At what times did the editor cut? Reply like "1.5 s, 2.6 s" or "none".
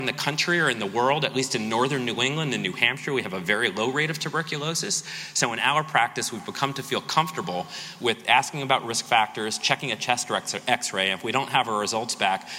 none